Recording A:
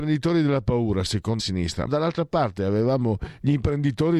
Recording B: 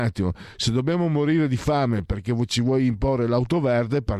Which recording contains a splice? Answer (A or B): A